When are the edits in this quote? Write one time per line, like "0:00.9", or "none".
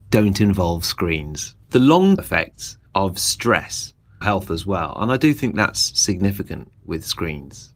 0:01.6
0:02.2
0:02.9
0:04.2